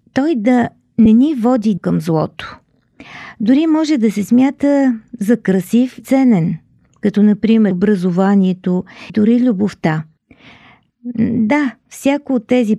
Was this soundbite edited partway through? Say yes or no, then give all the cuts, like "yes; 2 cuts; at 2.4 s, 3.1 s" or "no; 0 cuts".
yes; 4 cuts; at 1.8 s, 6.0 s, 7.7 s, 9.1 s